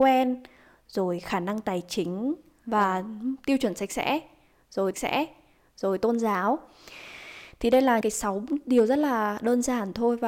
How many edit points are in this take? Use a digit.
2